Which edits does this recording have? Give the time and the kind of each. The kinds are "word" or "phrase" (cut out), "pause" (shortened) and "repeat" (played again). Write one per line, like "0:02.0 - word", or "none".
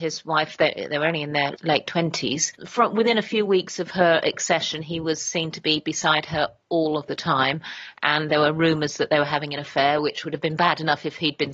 0:02.6 - word